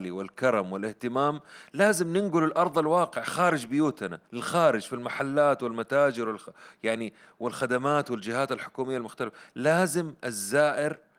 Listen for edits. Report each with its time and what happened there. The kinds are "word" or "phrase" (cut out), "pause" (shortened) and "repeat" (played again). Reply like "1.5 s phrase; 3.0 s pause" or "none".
4.2 s pause